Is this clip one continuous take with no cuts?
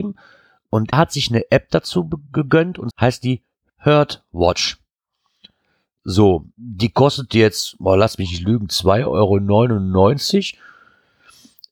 no; 3 cuts; at 0.9 s, 2.9 s, 6.5 s

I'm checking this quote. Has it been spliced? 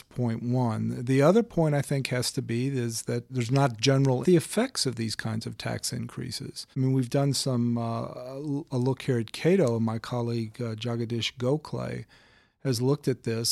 yes; 3 cuts; at 3.3 s, 4.2 s, 6.7 s

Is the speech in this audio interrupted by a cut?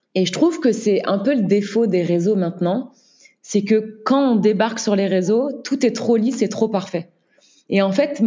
no; 0 cuts

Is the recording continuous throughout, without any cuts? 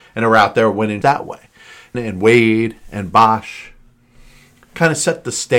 no; 2 cuts; at 1.0 s, 1.9 s

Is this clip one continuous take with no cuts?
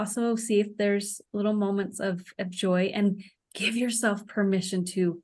yes; 0 cuts

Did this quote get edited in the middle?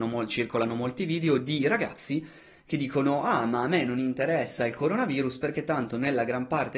no; 0 cuts

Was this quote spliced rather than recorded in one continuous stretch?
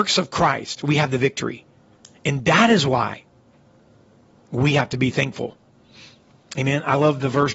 no; 0 cuts

